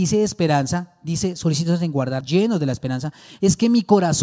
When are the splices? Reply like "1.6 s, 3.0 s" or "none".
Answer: 2.2 s